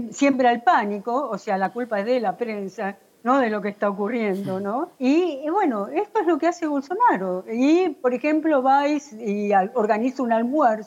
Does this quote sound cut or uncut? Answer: cut